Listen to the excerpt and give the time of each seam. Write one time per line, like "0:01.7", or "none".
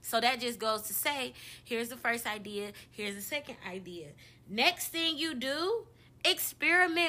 none